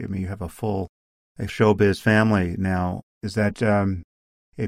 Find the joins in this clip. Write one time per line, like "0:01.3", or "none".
0:01.5
0:03.1
0:03.5